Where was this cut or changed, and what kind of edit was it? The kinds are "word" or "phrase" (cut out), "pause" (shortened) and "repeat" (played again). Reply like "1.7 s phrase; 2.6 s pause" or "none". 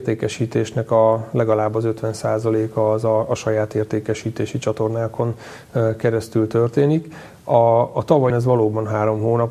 8.3 s word